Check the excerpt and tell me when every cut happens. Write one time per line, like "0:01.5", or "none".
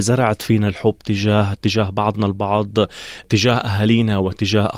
none